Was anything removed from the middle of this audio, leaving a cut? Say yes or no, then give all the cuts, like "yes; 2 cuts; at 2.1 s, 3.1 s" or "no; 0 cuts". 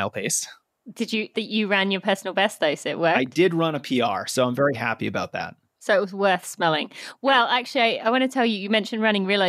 yes; 1 cut; at 1.3 s